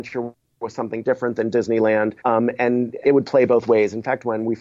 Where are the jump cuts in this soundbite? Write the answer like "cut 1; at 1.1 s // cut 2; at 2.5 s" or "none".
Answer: cut 1; at 1.1 s // cut 2; at 2.2 s // cut 3; at 3.0 s